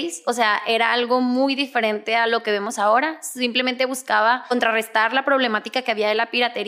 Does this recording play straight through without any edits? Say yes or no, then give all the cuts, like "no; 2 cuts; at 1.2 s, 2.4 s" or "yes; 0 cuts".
yes; 0 cuts